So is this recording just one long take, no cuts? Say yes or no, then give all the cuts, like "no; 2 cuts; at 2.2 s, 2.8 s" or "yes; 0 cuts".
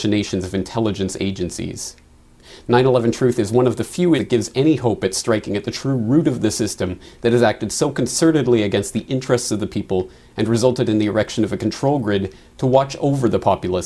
no; 1 cut; at 4.2 s